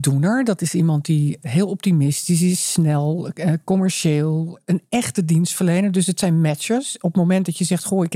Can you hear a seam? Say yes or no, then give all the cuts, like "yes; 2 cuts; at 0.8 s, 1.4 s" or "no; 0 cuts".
no; 0 cuts